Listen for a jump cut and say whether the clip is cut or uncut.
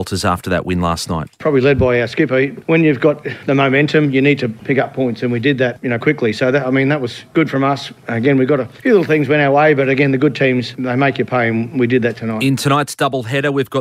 cut